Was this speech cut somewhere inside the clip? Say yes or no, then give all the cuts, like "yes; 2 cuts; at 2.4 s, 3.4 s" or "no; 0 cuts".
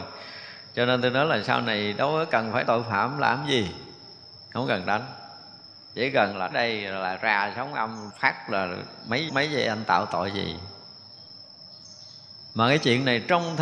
yes; 4 cuts; at 2.7 s, 6.5 s, 8.1 s, 9.3 s